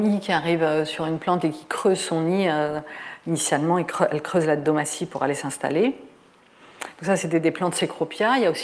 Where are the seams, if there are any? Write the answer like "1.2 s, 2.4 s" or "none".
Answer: none

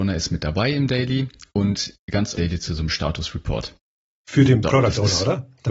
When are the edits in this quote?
2.3 s

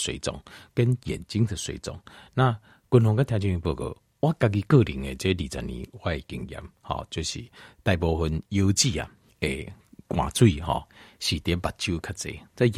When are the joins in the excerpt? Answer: 9.3 s

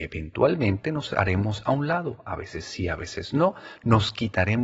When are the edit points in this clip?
none

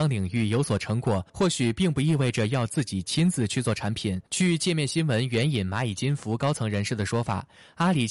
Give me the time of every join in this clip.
1.3 s, 4.3 s

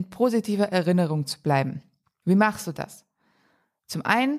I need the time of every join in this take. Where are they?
none

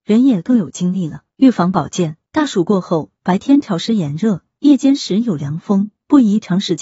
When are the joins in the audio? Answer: 1.3 s, 2.3 s

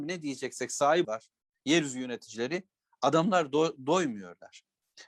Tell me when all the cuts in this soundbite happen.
1.0 s

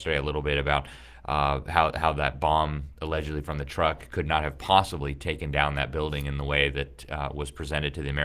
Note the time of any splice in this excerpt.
none

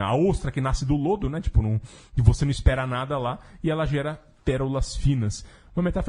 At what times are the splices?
none

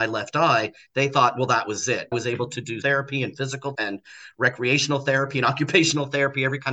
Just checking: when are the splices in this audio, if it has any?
2.1 s, 2.8 s, 3.7 s

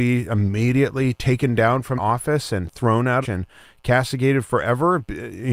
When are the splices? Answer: 2.0 s, 3.2 s

